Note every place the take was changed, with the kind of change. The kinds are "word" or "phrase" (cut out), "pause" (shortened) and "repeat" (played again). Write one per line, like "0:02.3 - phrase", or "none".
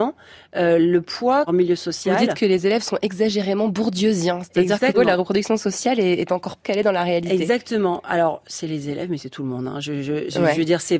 0:01.5 - phrase
0:04.9 - word
0:06.6 - word